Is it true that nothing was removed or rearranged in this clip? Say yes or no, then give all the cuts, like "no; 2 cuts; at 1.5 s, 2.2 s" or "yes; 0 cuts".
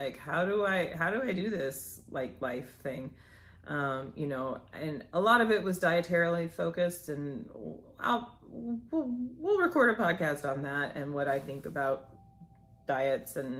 yes; 0 cuts